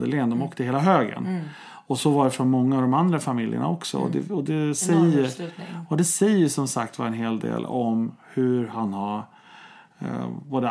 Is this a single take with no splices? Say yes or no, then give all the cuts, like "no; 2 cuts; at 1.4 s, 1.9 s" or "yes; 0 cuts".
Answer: yes; 0 cuts